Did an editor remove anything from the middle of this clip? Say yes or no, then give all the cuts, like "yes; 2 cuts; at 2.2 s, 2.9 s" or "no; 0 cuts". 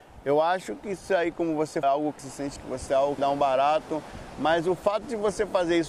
yes; 5 cuts; at 1.8 s, 2.2 s, 2.6 s, 2.9 s, 3.2 s